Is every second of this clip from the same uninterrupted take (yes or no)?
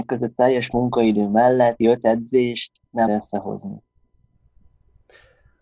no